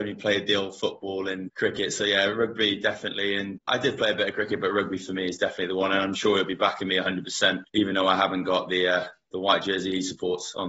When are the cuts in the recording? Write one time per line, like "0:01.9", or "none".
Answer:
0:01.5
0:03.6
0:07.7

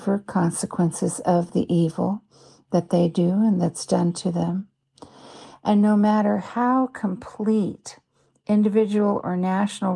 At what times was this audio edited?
none

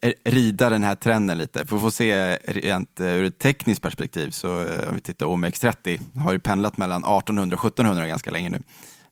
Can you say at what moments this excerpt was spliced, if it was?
none

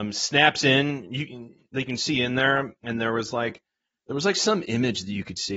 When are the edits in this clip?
none

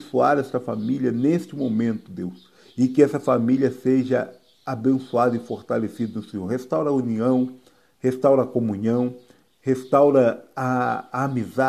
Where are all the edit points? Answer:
none

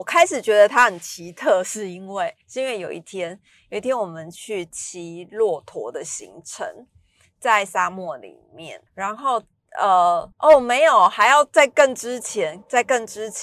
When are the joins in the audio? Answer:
0:02.4
0:08.9
0:10.3

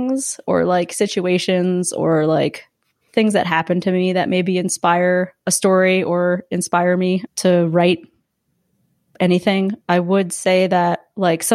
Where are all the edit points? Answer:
none

